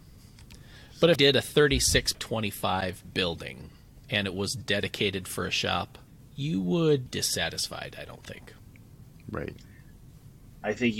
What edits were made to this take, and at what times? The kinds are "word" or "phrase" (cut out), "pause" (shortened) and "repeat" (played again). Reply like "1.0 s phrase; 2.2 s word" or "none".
1.1 s word; 2.1 s word; 4.0 s pause; 6.1 s pause; 7.1 s phrase